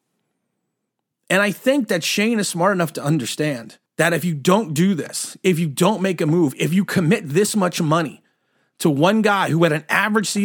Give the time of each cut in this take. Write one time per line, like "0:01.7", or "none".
0:03.9